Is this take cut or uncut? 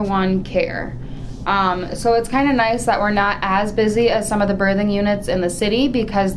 uncut